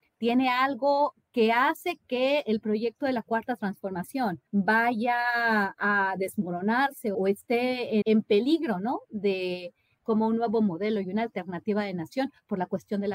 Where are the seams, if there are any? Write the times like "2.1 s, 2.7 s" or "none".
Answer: 4.5 s, 7.1 s, 8.0 s, 10.0 s